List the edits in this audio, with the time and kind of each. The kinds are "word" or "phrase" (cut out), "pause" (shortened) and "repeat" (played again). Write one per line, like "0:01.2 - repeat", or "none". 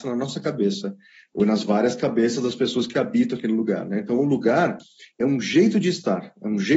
none